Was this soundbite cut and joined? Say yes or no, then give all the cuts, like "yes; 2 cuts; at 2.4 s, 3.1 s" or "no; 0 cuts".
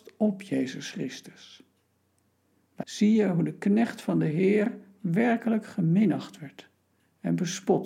yes; 1 cut; at 2.8 s